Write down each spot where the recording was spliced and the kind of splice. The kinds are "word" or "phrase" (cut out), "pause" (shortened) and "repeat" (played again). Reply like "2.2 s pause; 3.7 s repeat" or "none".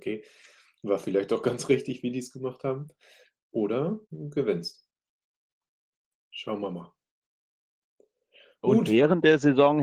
4.0 s pause